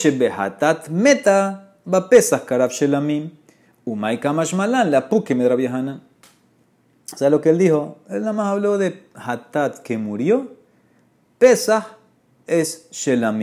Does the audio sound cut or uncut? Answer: uncut